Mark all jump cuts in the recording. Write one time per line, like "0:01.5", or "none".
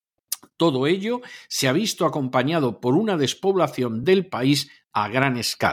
none